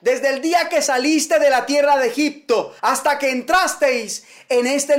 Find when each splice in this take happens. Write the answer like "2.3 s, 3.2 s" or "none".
2.8 s